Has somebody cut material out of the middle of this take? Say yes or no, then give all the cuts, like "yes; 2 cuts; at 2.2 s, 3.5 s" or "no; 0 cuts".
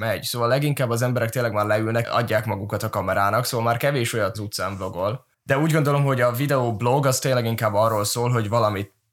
yes; 2 cuts; at 2.0 s, 4.3 s